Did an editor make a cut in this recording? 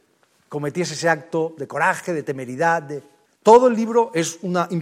yes; 1 cut; at 3.3 s

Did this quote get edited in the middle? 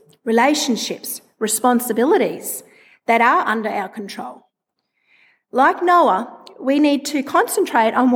no; 0 cuts

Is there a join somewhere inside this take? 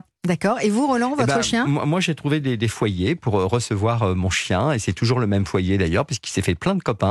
no; 0 cuts

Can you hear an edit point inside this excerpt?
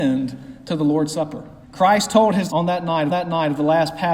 yes; 3 cuts; at 1.6 s, 2.5 s, 3.1 s

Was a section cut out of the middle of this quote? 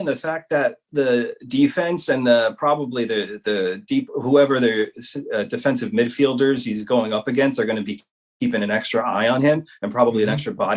no; 0 cuts

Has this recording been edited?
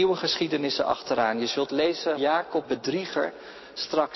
yes; 2 cuts; at 2.2 s, 2.6 s

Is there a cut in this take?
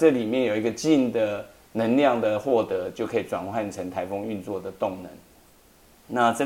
no; 0 cuts

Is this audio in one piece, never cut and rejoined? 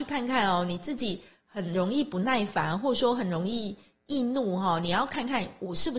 yes; 0 cuts

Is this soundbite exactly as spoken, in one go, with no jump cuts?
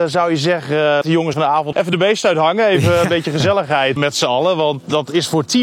no; 4 cuts; at 1.0 s, 1.3 s, 1.7 s, 4.0 s

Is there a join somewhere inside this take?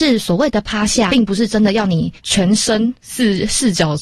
yes; 2 cuts; at 1.1 s, 2.2 s

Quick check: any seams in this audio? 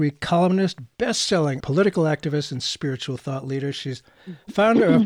yes; 1 cut; at 1.6 s

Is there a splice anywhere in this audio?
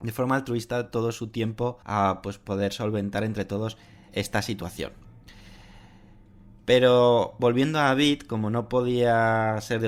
yes; 2 cuts; at 1.8 s, 4.1 s

